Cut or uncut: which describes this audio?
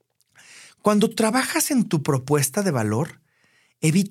uncut